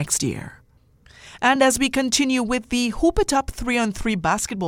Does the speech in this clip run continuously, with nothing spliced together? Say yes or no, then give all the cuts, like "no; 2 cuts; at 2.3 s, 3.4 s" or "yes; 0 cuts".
yes; 0 cuts